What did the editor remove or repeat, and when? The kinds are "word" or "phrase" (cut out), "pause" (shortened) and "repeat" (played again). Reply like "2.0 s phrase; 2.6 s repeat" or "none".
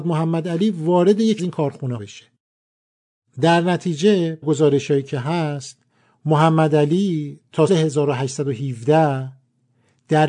1.4 s word; 2.0 s word; 4.4 s word; 7.7 s word